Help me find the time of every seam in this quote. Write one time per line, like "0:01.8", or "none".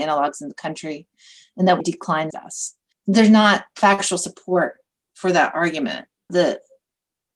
0:01.8
0:02.3